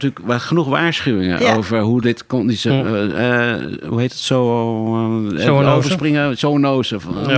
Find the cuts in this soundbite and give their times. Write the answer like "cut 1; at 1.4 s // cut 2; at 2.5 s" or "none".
none